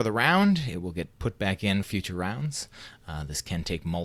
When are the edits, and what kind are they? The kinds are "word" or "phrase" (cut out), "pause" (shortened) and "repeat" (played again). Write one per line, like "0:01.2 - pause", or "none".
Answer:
0:01.1 - pause
0:01.8 - word